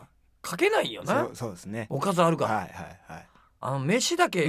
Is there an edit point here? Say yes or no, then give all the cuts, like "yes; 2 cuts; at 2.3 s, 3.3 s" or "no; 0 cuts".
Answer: no; 0 cuts